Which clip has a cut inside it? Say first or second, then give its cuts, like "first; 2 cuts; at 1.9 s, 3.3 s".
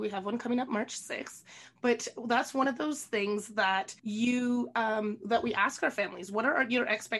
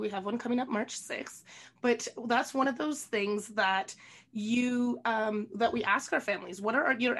first; 1 cut; at 4.0 s